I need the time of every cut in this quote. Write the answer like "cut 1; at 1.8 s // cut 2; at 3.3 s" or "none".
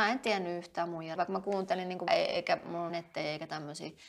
cut 1; at 1.2 s // cut 2; at 2.1 s // cut 3; at 2.9 s